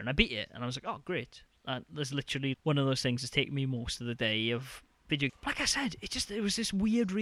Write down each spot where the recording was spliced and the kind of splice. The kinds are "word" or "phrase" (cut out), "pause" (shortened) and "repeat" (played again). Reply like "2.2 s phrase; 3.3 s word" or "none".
2.5 s word; 5.3 s phrase

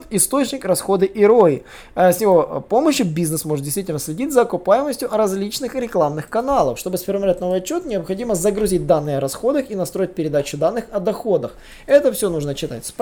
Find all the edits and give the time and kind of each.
none

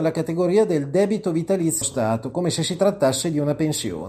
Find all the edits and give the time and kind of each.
1.8 s word

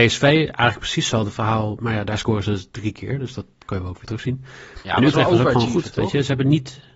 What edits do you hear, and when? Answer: none

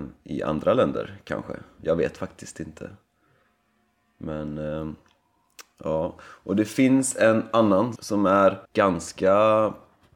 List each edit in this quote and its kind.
8.0 s word; 8.6 s pause

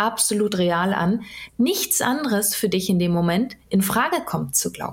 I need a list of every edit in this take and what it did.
1.5 s word

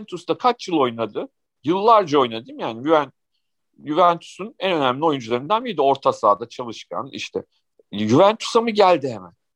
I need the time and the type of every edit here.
none

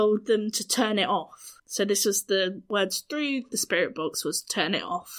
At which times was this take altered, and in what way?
1.6 s pause

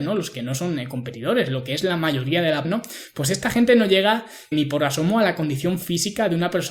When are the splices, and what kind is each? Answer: 2.6 s word; 4.5 s word

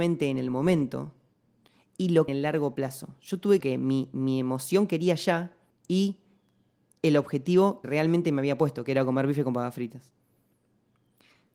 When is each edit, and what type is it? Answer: 1.3 s pause; 2.3 s phrase; 3.6 s phrase; 5.7 s pause; 7.8 s word

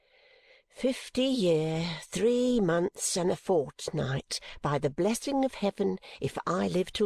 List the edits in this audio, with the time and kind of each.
none

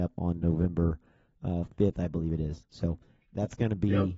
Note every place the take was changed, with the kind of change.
none

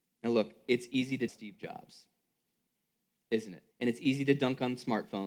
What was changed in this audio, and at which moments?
1.3 s phrase; 3.7 s pause

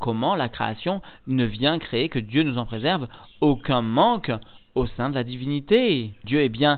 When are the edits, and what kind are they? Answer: none

